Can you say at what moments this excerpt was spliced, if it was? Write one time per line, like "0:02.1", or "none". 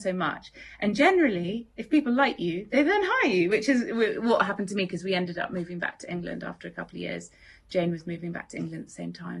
none

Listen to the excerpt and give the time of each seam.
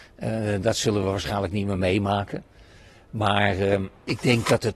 none

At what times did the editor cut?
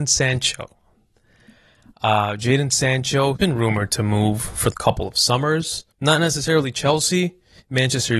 0:03.4
0:04.7
0:05.9

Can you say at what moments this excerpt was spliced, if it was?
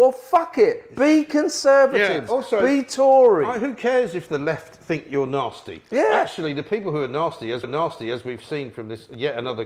0:07.6

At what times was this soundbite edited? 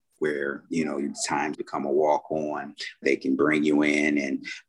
0:01.5
0:03.0

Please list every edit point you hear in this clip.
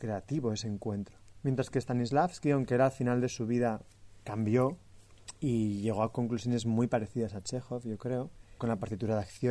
none

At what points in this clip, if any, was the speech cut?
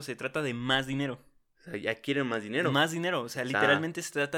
none

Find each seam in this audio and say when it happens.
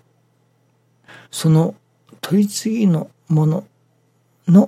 0:01.2

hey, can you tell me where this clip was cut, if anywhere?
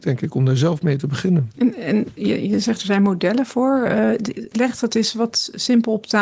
none

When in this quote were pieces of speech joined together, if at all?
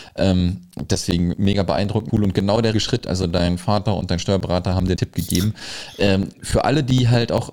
0:01.3
0:02.1
0:02.7
0:05.0
0:06.3

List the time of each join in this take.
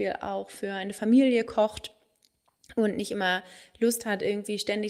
none

